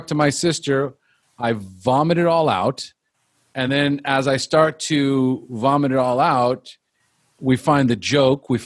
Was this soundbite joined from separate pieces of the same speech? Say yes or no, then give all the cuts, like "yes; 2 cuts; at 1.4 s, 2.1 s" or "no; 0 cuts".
no; 0 cuts